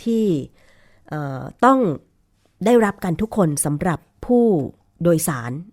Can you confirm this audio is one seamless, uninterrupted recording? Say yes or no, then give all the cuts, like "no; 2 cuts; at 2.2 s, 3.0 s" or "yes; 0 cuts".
yes; 0 cuts